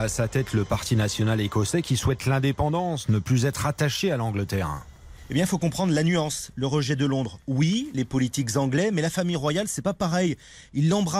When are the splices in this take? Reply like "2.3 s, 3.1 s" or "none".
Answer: none